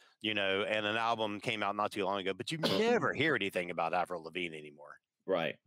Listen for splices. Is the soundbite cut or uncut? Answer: uncut